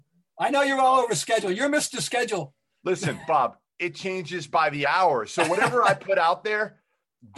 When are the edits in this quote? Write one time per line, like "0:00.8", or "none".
none